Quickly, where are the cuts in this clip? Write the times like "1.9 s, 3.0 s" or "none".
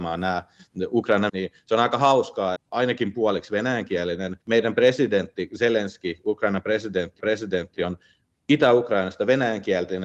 1.3 s, 2.6 s, 4.4 s, 7.2 s